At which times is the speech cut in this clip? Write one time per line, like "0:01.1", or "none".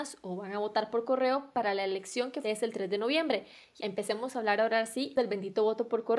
0:02.4
0:03.8